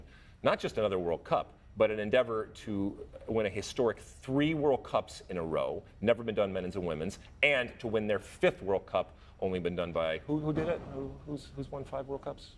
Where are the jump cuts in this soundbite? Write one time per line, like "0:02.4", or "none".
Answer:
none